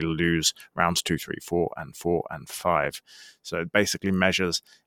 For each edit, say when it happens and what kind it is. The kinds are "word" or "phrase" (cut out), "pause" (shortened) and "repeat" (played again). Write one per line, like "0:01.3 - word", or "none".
0:01.9 - repeat